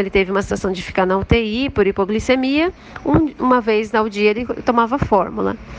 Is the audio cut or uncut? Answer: uncut